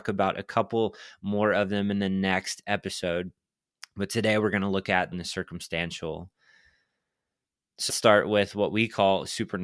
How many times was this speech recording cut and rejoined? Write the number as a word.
two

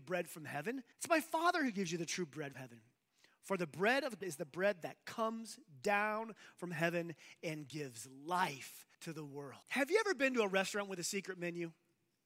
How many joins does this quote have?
five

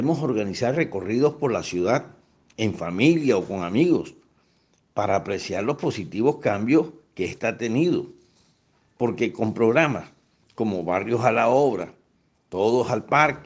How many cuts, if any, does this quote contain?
zero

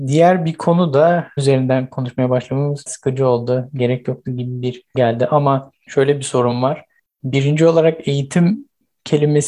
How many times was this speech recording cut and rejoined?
four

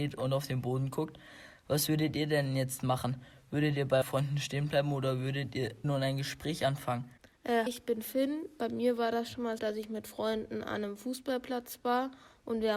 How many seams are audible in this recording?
four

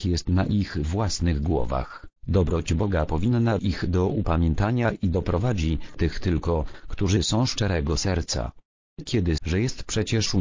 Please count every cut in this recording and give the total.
four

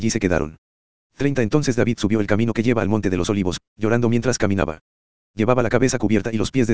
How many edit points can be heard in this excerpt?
zero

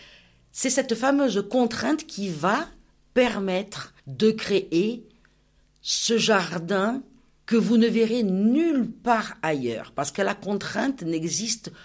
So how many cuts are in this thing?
one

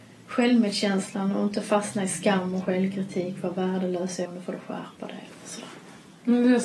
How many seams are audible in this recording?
one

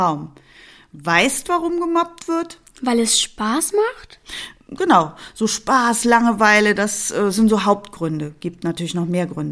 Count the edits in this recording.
one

